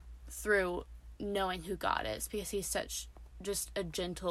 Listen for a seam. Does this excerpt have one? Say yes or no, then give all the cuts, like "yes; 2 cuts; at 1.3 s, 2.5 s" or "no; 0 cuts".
no; 0 cuts